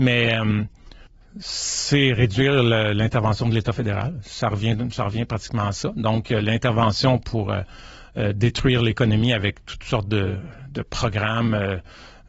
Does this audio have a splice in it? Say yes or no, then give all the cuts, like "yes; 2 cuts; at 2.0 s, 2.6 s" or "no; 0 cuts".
yes; 1 cut; at 1.1 s